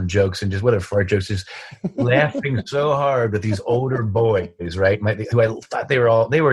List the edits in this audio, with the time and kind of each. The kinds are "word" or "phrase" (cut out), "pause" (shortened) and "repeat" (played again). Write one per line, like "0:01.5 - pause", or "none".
none